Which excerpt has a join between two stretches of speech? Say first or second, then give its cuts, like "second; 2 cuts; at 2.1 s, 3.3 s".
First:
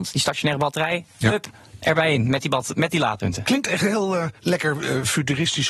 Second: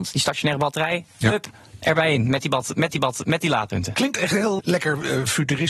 second; 2 cuts; at 2.9 s, 4.6 s